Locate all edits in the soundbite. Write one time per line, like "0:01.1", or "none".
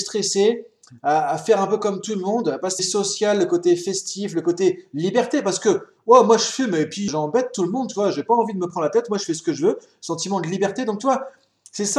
0:02.8
0:07.1